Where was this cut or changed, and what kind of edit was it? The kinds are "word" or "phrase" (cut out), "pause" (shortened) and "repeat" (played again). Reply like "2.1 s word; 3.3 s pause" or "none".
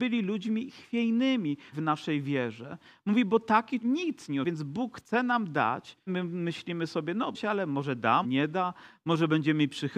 1.7 s word; 3.8 s word; 4.4 s word; 6.1 s word; 7.3 s word; 8.2 s word